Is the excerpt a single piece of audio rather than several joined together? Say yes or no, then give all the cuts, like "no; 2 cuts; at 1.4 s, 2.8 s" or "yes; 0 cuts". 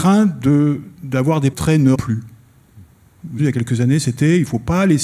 no; 3 cuts; at 1.5 s, 1.9 s, 3.4 s